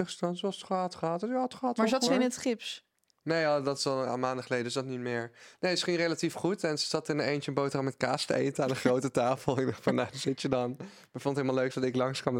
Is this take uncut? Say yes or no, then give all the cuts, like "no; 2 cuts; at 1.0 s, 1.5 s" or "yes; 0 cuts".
no; 1 cut; at 2.1 s